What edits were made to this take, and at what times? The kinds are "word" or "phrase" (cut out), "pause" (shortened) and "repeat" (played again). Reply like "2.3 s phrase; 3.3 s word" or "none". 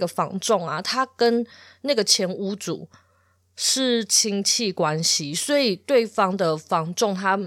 none